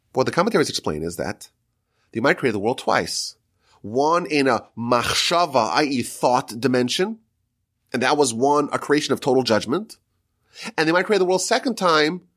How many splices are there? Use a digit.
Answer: 0